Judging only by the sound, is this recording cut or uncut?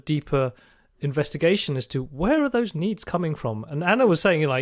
uncut